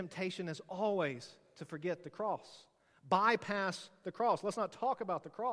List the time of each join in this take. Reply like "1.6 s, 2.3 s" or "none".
none